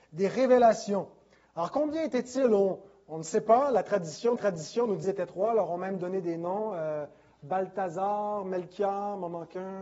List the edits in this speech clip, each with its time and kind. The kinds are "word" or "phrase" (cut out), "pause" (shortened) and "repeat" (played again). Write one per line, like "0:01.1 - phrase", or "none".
0:04.4 - repeat
0:05.0 - word